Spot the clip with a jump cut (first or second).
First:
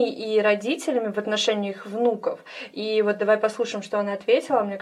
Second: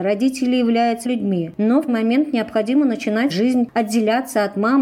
second